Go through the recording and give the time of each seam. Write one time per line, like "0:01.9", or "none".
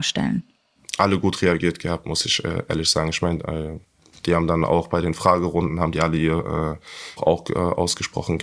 0:07.2